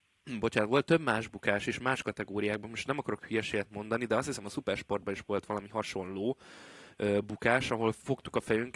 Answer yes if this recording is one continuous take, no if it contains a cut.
yes